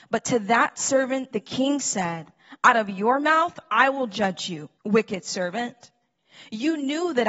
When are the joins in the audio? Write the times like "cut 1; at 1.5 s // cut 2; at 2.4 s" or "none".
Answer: cut 1; at 4.8 s